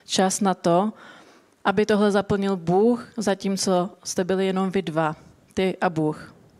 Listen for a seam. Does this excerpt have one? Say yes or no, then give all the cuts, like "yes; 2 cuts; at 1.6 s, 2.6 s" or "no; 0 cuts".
no; 0 cuts